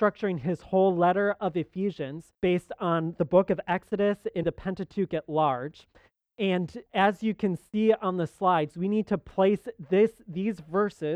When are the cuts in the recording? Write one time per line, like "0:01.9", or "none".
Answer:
0:02.3
0:04.4
0:06.9